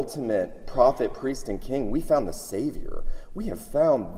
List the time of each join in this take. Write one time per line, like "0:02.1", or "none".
none